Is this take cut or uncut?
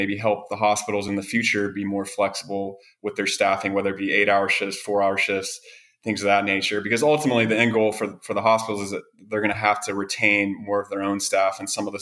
uncut